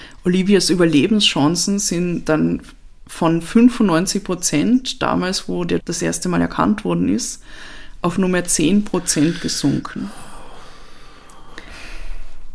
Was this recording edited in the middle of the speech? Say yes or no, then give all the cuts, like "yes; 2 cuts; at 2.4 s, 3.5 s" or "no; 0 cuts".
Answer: yes; 1 cut; at 5.8 s